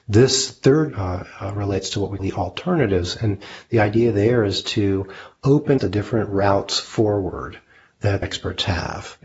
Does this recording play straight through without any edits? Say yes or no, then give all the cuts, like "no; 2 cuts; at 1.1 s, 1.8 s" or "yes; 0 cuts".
no; 4 cuts; at 0.9 s, 2.2 s, 5.8 s, 8.2 s